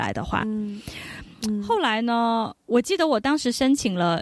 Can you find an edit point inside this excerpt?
yes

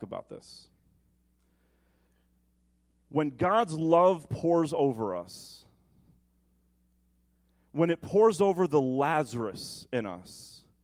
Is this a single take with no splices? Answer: yes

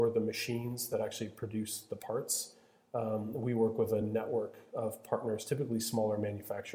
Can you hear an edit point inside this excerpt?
no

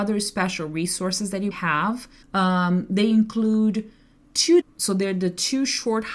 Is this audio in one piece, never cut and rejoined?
no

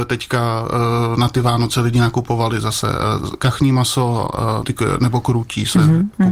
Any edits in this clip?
yes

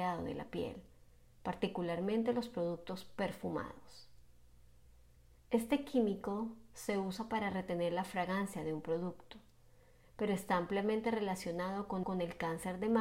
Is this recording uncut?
no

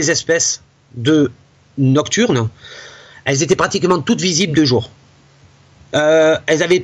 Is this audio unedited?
yes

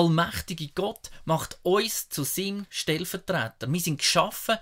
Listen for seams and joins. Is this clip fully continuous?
yes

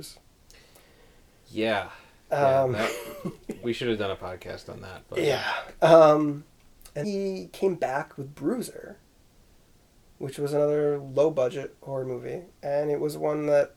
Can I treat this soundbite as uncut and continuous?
no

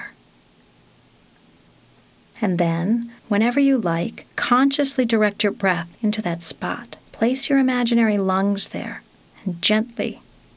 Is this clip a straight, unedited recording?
no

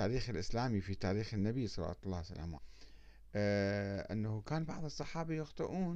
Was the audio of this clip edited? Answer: yes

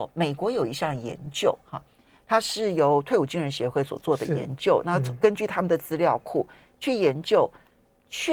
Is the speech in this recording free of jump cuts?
yes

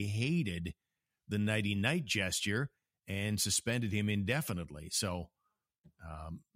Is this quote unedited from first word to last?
yes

